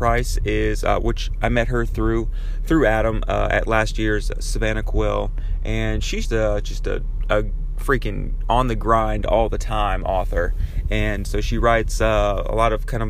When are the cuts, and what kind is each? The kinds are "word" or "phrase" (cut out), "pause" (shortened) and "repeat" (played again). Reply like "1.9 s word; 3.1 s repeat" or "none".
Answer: 6.2 s word; 11.2 s word